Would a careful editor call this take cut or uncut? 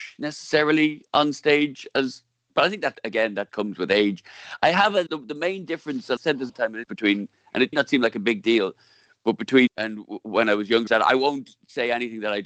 cut